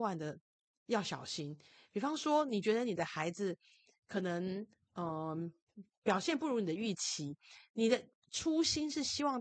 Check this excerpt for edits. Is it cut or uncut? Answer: uncut